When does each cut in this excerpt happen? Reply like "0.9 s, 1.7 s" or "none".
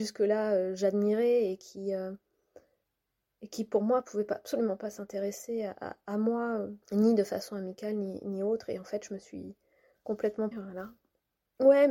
6.8 s, 10.5 s